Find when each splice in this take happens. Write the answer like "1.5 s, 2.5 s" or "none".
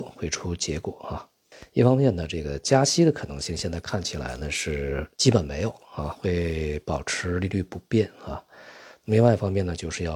5.1 s